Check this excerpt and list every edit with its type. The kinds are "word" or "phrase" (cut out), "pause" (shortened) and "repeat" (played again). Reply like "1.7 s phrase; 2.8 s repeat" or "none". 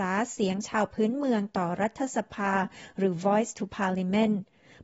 none